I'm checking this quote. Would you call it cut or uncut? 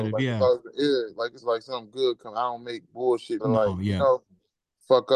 cut